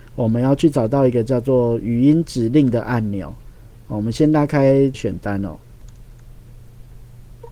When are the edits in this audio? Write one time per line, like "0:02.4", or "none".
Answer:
0:04.9